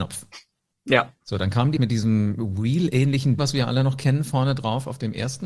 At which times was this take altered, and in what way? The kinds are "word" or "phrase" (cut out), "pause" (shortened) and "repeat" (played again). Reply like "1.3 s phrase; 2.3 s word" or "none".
1.8 s word; 3.4 s word